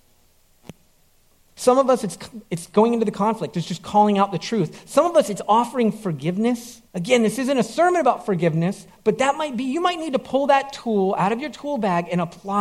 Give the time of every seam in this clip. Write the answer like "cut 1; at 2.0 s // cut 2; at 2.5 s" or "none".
cut 1; at 6.9 s